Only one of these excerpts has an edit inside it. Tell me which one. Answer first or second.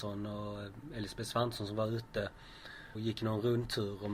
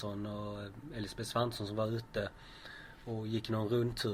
first